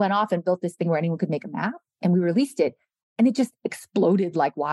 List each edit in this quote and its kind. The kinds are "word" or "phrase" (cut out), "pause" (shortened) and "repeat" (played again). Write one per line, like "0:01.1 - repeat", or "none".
none